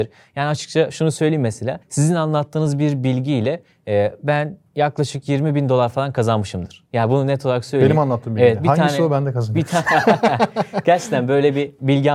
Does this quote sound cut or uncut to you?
cut